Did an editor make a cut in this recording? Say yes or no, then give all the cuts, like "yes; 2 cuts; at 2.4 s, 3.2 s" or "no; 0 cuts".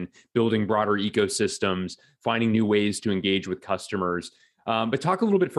no; 0 cuts